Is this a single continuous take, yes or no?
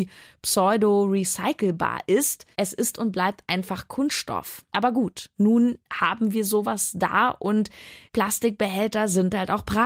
no